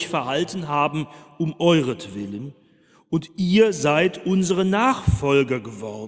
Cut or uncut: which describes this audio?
uncut